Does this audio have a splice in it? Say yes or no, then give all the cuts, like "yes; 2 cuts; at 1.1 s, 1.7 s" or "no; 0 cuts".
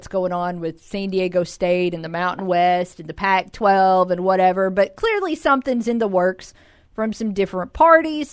no; 0 cuts